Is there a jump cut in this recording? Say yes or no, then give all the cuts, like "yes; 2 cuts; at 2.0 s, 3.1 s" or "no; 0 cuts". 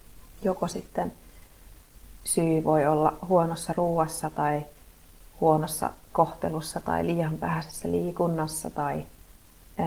no; 0 cuts